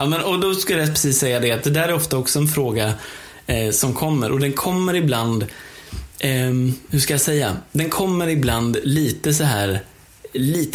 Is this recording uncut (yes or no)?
yes